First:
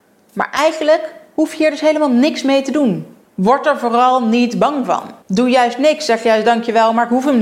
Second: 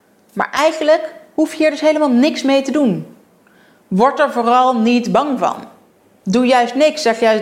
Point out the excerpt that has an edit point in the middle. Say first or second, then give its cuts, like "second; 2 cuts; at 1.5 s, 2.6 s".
first; 2 cuts; at 3.3 s, 5.2 s